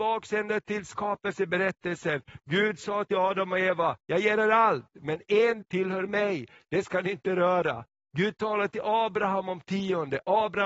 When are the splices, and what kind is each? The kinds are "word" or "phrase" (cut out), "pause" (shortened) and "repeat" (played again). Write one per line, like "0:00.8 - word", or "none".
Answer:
0:05.6 - word